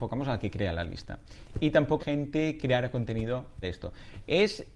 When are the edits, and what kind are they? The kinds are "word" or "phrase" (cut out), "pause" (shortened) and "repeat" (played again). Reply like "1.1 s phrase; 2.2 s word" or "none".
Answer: 2.0 s phrase; 2.6 s word; 3.6 s phrase